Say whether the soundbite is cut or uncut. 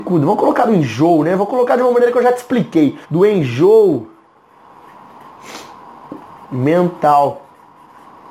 cut